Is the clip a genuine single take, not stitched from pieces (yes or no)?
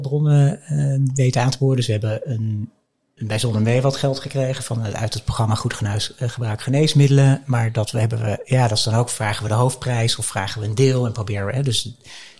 yes